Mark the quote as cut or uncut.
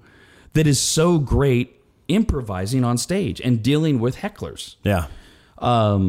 uncut